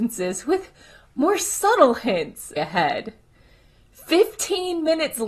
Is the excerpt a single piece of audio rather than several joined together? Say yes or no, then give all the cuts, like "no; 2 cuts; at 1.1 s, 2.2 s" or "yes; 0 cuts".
no; 1 cut; at 2.6 s